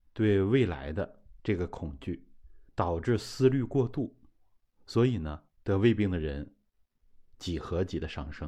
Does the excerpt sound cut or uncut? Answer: cut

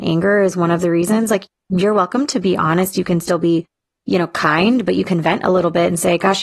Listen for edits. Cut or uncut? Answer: uncut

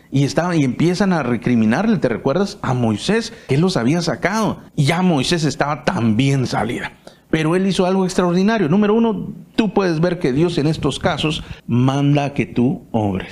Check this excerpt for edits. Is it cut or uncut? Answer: cut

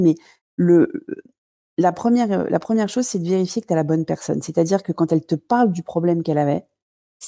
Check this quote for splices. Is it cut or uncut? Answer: uncut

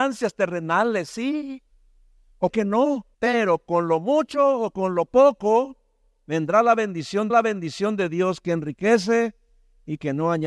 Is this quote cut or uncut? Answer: cut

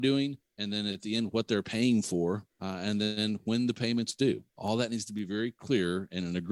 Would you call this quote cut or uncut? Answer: cut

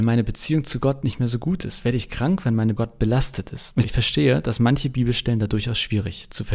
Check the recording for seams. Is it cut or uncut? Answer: cut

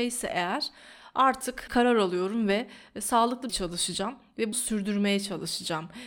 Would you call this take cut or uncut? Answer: cut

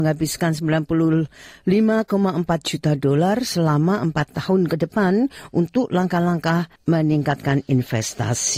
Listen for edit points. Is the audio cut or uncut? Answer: cut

